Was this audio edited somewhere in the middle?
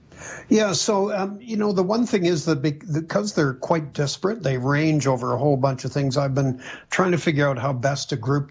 no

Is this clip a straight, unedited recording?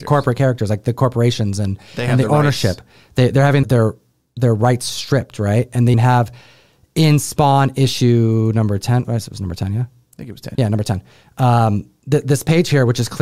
no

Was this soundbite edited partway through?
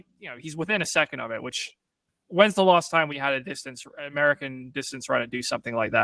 yes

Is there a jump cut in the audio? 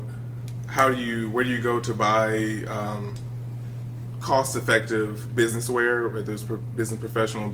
no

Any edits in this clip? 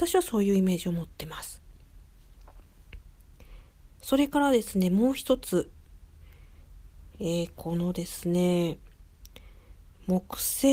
no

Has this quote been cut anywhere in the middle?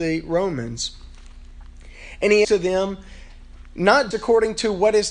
yes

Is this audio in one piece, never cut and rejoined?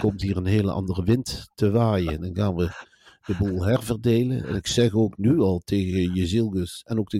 yes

